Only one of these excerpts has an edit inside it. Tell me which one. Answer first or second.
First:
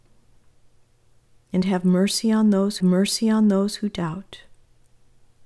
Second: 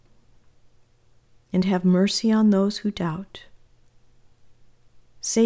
first